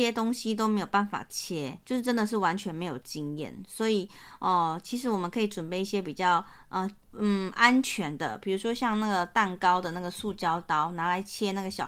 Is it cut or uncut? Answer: cut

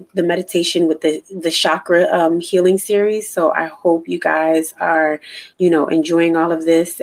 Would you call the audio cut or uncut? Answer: cut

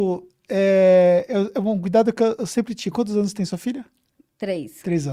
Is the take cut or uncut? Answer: uncut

